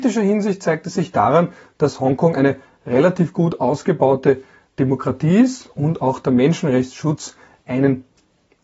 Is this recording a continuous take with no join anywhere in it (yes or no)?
yes